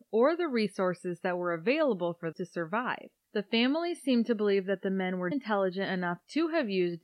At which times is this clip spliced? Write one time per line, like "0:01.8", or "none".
0:02.3
0:05.3